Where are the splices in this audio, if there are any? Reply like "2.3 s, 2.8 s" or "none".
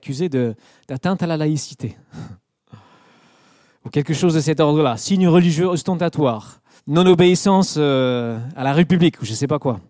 6.8 s